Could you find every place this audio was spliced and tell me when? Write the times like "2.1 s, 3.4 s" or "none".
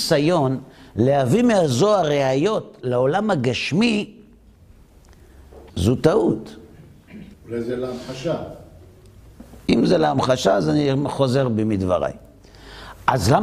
5.7 s, 7.3 s